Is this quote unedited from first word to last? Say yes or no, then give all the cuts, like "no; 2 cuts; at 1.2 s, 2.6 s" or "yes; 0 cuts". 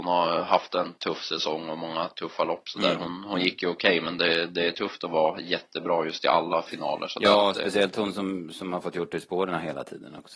yes; 0 cuts